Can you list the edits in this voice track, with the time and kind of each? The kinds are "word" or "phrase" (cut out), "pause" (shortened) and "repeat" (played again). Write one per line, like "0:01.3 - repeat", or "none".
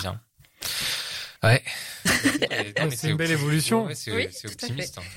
0:01.4 - pause
0:02.5 - word